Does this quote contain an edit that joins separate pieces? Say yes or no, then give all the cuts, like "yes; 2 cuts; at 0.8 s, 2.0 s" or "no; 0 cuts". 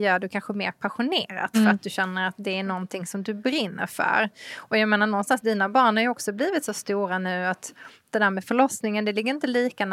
no; 0 cuts